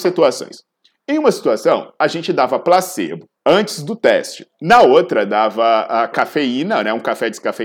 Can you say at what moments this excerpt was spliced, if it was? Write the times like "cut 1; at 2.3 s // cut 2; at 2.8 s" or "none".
cut 1; at 3.4 s